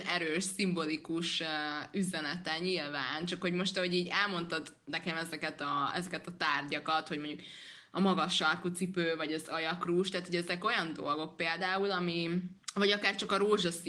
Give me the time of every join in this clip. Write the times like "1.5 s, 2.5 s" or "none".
12.6 s